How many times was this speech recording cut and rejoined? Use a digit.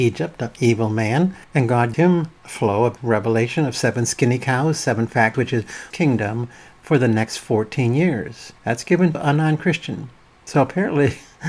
8